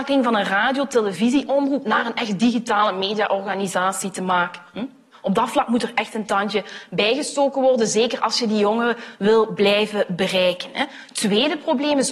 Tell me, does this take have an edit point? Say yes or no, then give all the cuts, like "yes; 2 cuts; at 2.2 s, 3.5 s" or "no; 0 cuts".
no; 0 cuts